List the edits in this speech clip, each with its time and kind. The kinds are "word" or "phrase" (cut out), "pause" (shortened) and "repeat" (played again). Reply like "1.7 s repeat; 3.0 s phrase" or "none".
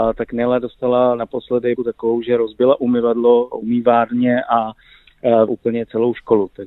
1.8 s word; 3.5 s phrase; 5.5 s word